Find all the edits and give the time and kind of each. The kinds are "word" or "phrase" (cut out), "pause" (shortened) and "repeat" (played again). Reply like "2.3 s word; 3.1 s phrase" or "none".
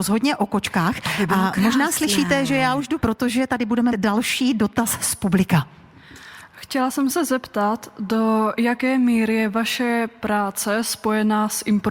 3.0 s word; 3.9 s word